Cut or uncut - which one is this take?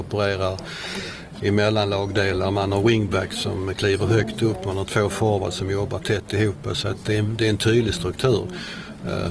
uncut